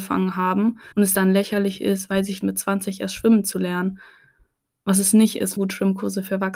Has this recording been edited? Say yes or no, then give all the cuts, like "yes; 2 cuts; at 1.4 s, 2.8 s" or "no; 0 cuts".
yes; 3 cuts; at 0.9 s, 2.4 s, 5.6 s